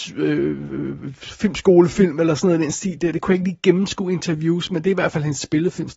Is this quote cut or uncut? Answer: uncut